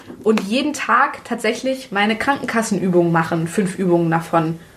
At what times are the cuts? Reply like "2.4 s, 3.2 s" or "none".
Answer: none